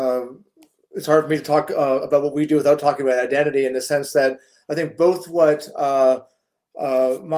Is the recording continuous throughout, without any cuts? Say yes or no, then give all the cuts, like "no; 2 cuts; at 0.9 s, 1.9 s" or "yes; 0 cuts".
yes; 0 cuts